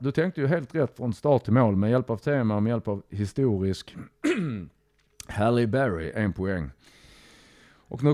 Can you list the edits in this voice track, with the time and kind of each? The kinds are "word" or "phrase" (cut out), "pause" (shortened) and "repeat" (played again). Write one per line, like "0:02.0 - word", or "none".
none